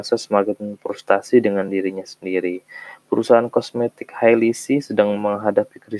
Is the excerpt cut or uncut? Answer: uncut